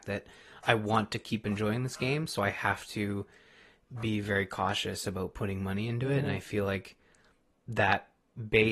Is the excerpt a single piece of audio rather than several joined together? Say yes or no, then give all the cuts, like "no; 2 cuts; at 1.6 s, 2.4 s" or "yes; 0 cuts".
yes; 0 cuts